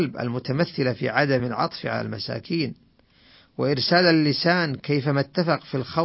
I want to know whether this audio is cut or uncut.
uncut